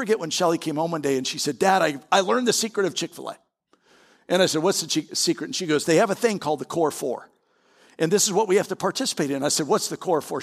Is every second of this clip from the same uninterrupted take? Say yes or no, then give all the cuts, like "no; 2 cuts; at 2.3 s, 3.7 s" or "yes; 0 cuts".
yes; 0 cuts